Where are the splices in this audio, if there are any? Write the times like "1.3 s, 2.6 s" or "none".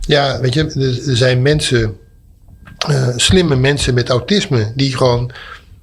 none